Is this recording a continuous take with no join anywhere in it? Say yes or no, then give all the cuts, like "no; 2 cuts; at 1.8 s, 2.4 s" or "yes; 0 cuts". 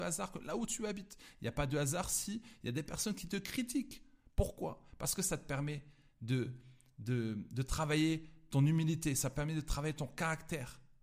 yes; 0 cuts